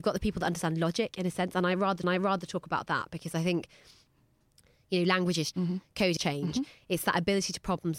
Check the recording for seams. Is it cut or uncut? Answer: cut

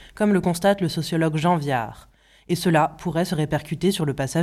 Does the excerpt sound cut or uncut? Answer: uncut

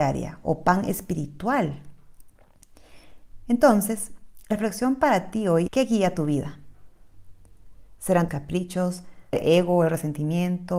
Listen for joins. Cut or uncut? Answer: cut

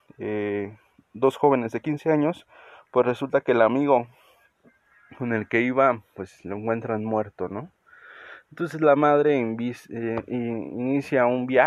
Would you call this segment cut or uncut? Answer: uncut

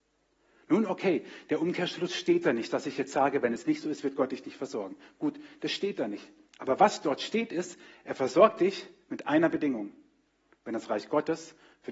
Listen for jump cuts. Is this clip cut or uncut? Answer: uncut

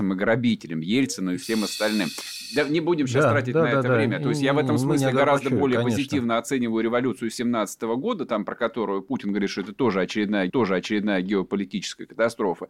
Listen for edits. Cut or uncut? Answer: cut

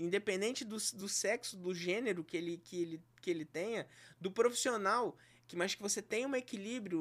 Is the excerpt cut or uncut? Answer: uncut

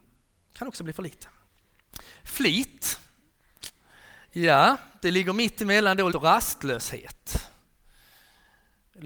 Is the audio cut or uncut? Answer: cut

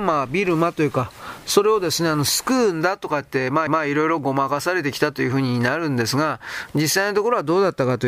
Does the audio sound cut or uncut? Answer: cut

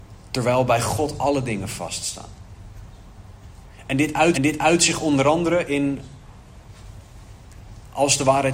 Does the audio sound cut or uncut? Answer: cut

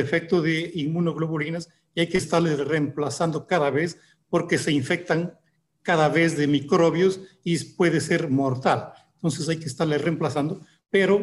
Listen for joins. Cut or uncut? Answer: uncut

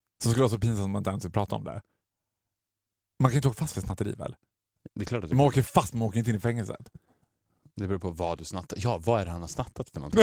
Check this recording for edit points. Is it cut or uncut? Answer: uncut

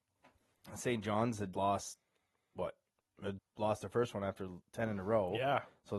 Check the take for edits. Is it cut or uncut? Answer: cut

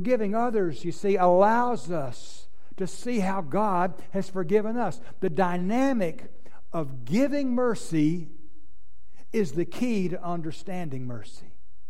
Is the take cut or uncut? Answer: uncut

